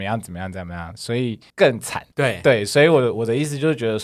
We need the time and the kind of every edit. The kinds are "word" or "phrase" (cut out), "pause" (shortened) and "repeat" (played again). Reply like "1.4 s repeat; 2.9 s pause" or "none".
1.5 s pause; 2.1 s pause